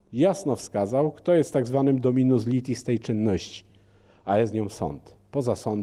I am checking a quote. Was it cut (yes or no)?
no